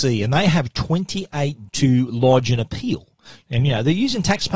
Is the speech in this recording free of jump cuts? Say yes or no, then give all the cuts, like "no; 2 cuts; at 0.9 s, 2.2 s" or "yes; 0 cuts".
no; 1 cut; at 1.7 s